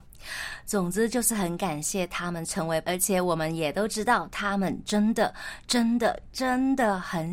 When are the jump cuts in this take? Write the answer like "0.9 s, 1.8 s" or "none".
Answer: 2.8 s